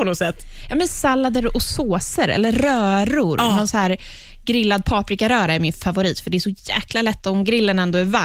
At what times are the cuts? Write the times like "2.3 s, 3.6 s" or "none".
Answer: none